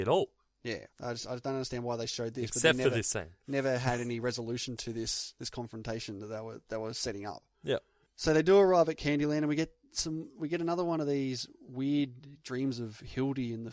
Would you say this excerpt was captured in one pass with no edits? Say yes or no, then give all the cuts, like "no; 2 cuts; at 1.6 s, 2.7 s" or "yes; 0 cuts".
no; 1 cut; at 0.9 s